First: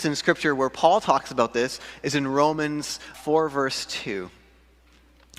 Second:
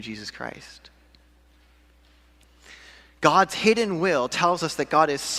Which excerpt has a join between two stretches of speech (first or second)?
first